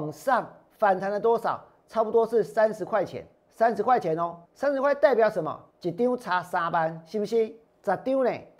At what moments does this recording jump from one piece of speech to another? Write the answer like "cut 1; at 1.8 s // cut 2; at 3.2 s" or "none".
cut 1; at 3.3 s // cut 2; at 4.5 s // cut 3; at 5.7 s // cut 4; at 7.7 s